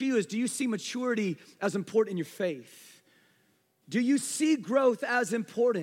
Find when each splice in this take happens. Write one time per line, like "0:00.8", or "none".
none

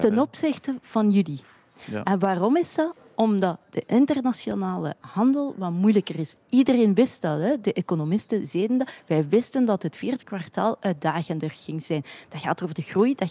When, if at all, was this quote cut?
none

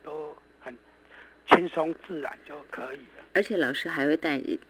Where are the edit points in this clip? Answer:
0:02.7
0:03.3

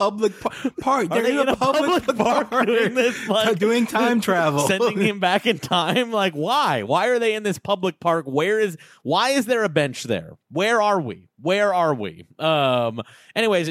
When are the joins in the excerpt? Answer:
none

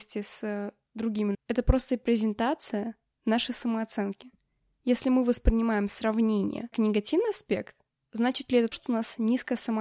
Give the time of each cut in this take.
0:01.3
0:06.7
0:08.7

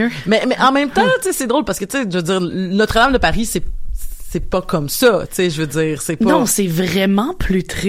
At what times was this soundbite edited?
none

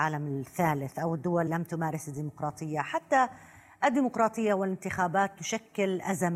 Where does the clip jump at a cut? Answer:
0:01.5

